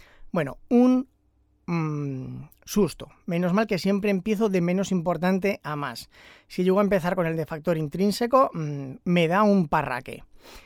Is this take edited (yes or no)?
no